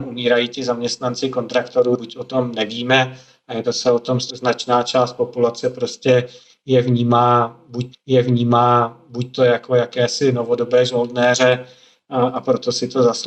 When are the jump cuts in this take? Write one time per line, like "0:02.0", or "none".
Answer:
0:02.0
0:03.6
0:04.3
0:07.9

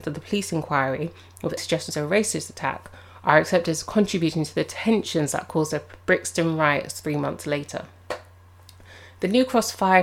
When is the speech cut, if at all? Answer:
0:01.6

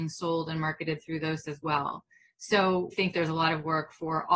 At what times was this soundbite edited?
0:01.4
0:02.9

